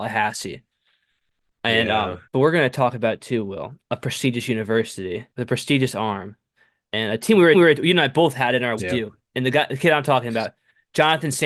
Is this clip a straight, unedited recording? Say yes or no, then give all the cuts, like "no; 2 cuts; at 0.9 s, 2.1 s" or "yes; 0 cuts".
no; 4 cuts; at 2.3 s, 5.3 s, 7.5 s, 8.8 s